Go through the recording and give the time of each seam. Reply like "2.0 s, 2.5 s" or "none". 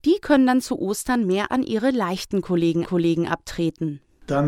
1.5 s, 2.8 s